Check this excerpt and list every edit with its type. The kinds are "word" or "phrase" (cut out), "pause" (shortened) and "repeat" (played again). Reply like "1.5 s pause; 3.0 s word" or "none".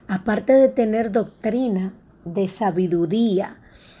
none